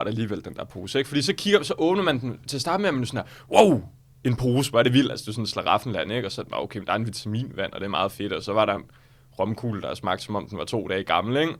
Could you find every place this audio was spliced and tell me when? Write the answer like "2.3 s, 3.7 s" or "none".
none